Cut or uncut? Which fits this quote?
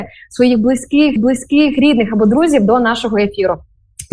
cut